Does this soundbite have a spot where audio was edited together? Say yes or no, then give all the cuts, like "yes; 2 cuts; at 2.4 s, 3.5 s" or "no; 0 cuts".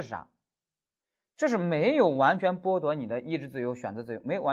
no; 0 cuts